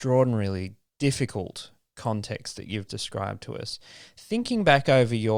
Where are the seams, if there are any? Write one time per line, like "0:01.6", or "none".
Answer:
0:02.9